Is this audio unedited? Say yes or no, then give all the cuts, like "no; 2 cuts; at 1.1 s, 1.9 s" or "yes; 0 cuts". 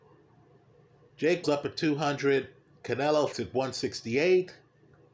no; 2 cuts; at 1.4 s, 3.3 s